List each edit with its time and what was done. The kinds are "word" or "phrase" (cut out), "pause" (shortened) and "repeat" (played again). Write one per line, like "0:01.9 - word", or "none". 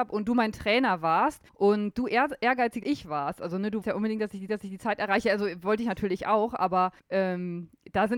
0:01.5 - pause
0:02.8 - word
0:03.8 - word
0:04.5 - repeat
0:07.0 - pause